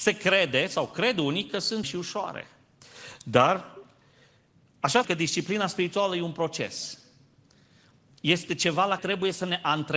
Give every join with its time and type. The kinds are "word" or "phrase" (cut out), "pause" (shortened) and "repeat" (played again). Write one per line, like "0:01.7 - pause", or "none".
0:01.8 - word
0:05.0 - word
0:09.0 - word